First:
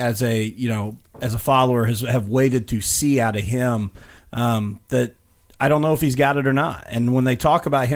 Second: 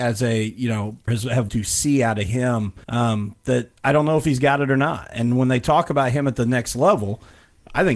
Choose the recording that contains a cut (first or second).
second